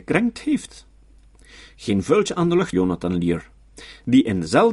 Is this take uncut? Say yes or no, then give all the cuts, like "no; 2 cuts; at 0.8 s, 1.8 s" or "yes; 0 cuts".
no; 1 cut; at 2.7 s